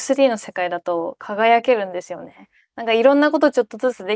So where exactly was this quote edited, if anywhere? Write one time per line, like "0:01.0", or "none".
none